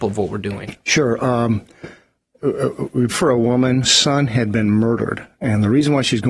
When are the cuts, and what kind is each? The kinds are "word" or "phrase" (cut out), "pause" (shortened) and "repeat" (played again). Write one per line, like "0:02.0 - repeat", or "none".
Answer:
0:03.1 - word
0:03.8 - word